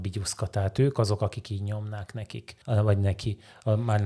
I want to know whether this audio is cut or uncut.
cut